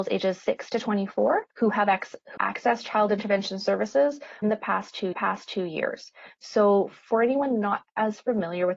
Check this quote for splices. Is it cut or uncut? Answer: cut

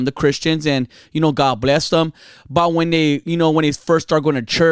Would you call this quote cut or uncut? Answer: uncut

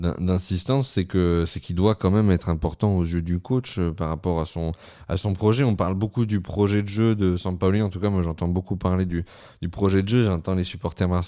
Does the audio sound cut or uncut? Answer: uncut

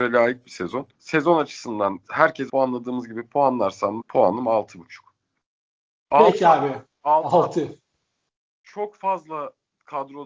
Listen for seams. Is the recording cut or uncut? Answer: cut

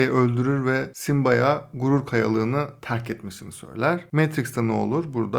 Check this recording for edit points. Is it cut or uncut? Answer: uncut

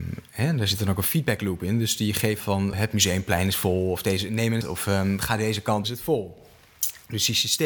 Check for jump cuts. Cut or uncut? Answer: cut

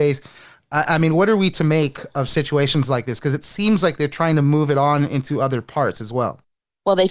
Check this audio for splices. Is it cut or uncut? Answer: uncut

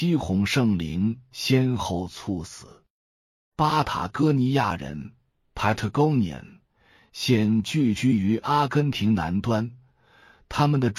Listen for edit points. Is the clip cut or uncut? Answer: uncut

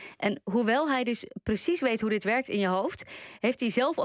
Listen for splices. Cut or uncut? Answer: uncut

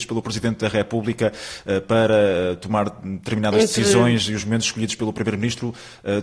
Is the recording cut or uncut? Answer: uncut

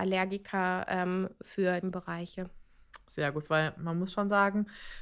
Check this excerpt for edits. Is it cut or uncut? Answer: cut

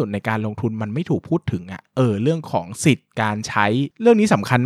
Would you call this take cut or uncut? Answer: uncut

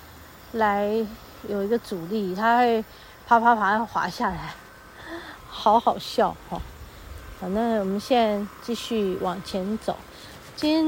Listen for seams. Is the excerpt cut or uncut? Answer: uncut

